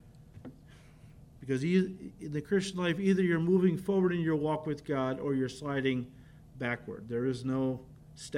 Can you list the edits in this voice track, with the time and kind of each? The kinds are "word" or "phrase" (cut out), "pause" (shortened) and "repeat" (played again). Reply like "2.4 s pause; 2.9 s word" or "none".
none